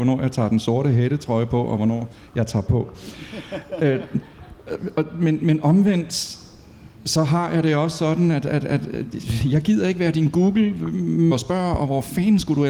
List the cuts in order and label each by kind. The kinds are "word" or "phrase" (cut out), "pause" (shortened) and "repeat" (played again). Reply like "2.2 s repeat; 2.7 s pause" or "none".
2.7 s word; 5.4 s word; 11.3 s phrase